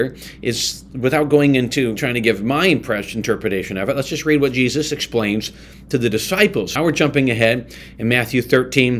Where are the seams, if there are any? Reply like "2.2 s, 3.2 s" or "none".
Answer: 2.0 s, 6.8 s